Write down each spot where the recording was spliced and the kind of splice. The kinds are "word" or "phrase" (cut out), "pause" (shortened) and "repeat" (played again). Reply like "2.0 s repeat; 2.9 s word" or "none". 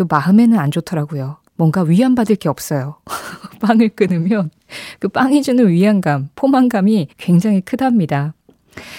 1.5 s pause; 7.1 s pause